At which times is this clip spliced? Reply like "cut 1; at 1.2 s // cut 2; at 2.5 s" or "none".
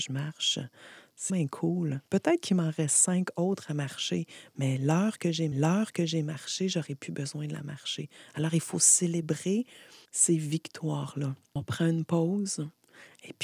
cut 1; at 1.3 s // cut 2; at 2.0 s // cut 3; at 5.5 s // cut 4; at 10.0 s

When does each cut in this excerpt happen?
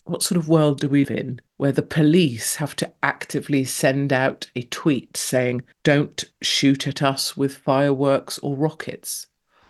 cut 1; at 1.0 s // cut 2; at 1.5 s // cut 3; at 5.7 s

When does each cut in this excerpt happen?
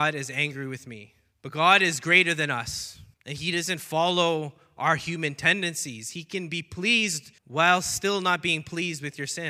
cut 1; at 1.3 s // cut 2; at 3.1 s // cut 3; at 7.4 s

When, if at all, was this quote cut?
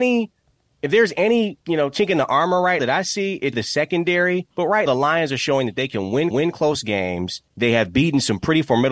cut 1; at 1.6 s // cut 2; at 2.8 s // cut 3; at 3.5 s // cut 4; at 4.5 s // cut 5; at 4.9 s // cut 6; at 6.3 s // cut 7; at 7.5 s

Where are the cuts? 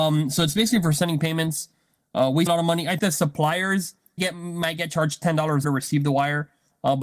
cut 1; at 2.5 s // cut 2; at 3.0 s // cut 3; at 4.2 s // cut 4; at 5.6 s

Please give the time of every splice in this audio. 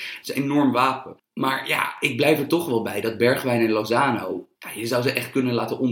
cut 1; at 4.5 s

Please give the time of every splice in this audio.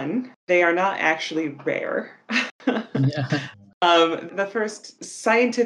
none

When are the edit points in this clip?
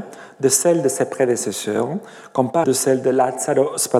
cut 1; at 2.6 s

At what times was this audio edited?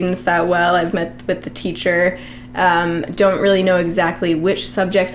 cut 1; at 0.9 s

